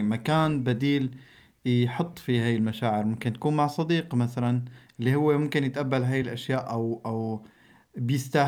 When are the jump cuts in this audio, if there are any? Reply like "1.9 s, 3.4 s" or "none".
none